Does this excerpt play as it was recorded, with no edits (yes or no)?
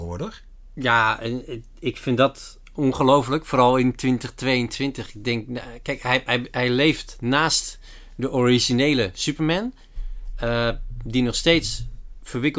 yes